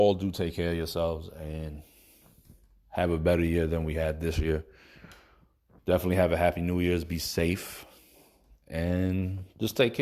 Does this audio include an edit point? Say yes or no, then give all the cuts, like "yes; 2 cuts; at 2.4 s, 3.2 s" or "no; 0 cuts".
no; 0 cuts